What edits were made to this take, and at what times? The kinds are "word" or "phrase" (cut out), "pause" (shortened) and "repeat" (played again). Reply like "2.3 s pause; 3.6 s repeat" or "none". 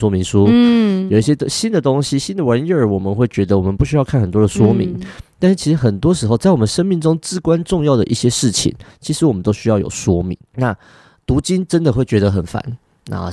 10.5 s pause